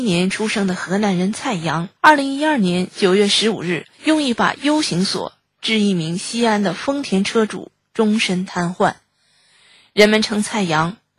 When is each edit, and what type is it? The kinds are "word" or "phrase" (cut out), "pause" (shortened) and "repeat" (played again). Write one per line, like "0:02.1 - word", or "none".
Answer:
0:02.0 - pause
0:03.9 - pause

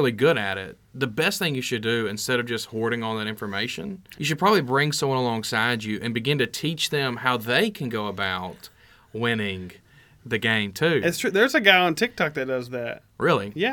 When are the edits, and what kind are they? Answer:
0:04.1 - word

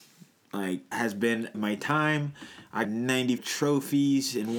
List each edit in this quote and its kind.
0:00.9 - word
0:01.5 - phrase
0:02.8 - word
0:03.4 - phrase

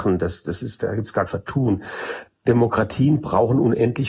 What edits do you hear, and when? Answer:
0:01.3 - word

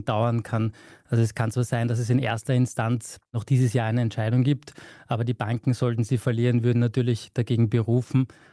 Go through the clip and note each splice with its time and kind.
none

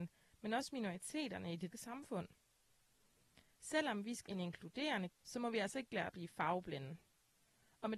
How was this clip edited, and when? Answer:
0:01.7 - word
0:04.3 - word
0:05.1 - word
0:06.1 - word

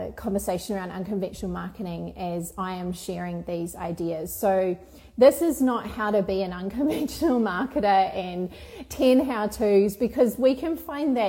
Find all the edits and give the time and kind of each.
none

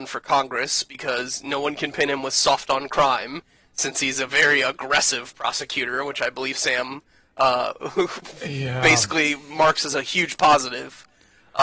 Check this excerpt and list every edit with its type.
none

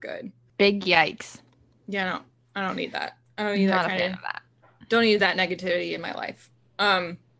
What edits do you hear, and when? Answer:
none

